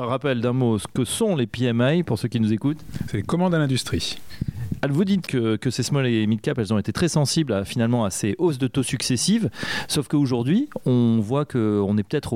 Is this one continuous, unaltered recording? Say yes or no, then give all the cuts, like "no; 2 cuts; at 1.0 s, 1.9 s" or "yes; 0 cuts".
no; 1 cut; at 5.3 s